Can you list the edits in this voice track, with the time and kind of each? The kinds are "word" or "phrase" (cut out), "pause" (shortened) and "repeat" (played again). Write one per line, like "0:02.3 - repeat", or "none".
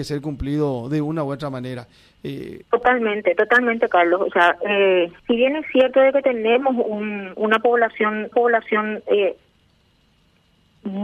0:02.6 - pause
0:05.2 - pause
0:07.4 - word
0:08.3 - repeat